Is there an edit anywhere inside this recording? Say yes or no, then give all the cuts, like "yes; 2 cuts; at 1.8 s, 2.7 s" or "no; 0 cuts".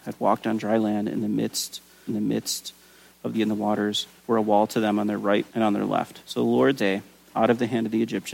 yes; 6 cuts; at 2.1 s, 3.3 s, 4.2 s, 5.5 s, 6.2 s, 6.8 s